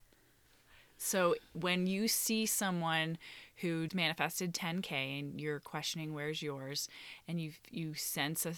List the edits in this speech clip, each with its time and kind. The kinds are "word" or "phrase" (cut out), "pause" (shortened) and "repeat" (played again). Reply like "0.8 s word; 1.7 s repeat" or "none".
3.9 s word